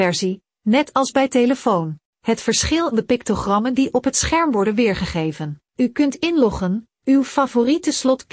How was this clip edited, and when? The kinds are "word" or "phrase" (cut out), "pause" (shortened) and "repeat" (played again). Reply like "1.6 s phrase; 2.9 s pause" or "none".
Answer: 2.1 s pause; 2.9 s phrase; 5.6 s pause

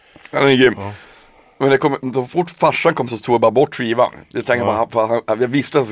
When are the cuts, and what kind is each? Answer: 3.1 s word

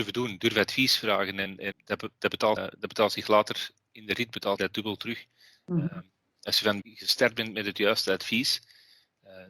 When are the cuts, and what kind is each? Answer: 1.7 s word; 2.6 s word; 4.6 s word; 6.8 s word

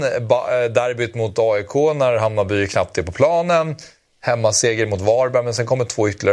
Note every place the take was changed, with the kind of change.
none

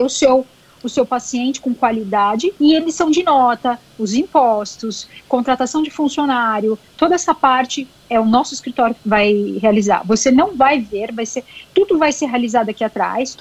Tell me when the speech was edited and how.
2.6 s pause; 9.0 s word

